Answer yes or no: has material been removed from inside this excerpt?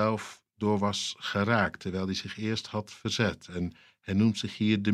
no